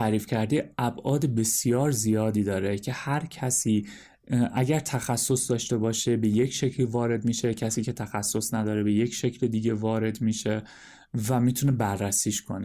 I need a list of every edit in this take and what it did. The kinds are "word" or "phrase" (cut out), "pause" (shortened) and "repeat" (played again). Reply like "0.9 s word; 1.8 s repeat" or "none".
none